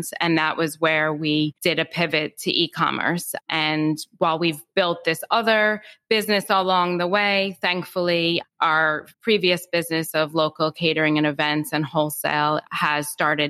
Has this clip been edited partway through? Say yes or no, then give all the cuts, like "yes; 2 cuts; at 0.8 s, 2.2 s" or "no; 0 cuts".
yes; 3 cuts; at 1.6 s, 3.4 s, 9.1 s